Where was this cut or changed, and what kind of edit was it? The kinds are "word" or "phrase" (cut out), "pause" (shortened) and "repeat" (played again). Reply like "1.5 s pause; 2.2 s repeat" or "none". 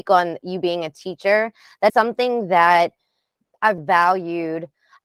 1.9 s word; 3.8 s word